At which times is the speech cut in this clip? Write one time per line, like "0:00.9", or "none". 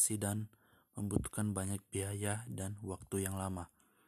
none